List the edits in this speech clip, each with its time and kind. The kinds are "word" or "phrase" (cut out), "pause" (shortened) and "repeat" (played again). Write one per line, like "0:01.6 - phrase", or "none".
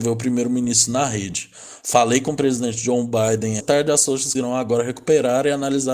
0:03.6 - word
0:04.3 - word